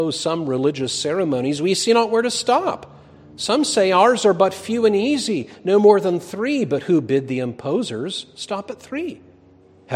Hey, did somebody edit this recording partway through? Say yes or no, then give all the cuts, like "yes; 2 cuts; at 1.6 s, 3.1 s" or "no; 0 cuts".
no; 0 cuts